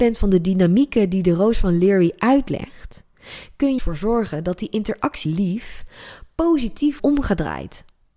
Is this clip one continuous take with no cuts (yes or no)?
no